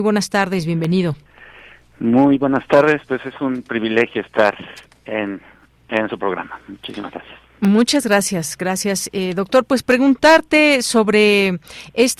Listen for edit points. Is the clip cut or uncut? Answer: uncut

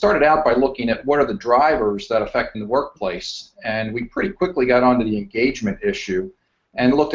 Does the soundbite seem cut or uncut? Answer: cut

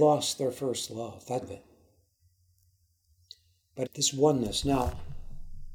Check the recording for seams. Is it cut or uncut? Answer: cut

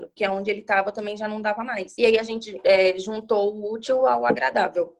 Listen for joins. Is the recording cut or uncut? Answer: uncut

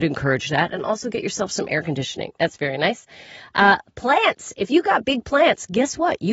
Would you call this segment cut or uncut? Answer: uncut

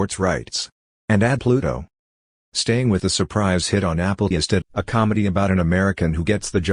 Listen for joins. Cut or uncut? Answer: cut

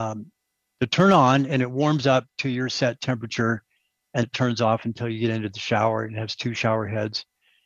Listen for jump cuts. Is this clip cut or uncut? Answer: cut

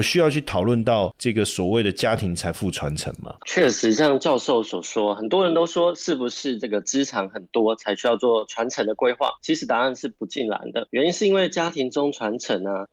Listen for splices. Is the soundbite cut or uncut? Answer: cut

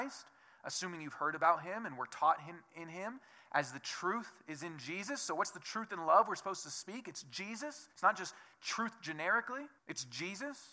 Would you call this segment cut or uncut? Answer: cut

